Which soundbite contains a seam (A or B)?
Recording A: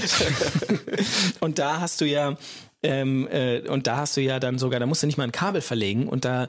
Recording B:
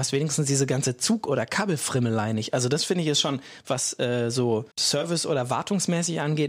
B